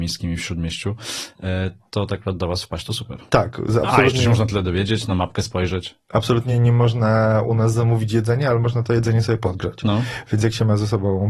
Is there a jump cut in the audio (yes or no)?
no